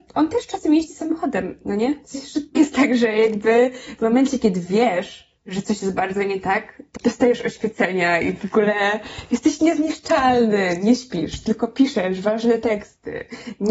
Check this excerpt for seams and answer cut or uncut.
cut